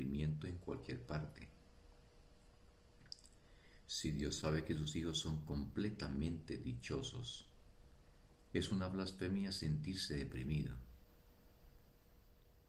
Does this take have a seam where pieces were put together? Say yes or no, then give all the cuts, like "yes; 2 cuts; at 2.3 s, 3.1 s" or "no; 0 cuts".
no; 0 cuts